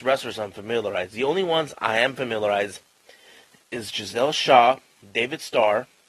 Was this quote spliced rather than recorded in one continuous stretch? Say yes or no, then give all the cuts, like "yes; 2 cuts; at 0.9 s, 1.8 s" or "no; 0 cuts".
no; 0 cuts